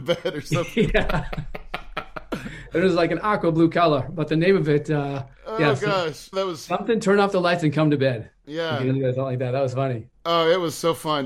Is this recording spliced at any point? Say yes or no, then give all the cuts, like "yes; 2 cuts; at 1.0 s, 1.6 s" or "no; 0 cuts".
yes; 1 cut; at 6.3 s